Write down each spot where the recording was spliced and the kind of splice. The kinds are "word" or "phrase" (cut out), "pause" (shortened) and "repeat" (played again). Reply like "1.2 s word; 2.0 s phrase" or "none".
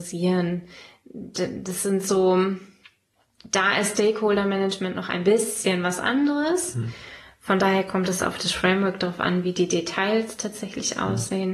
none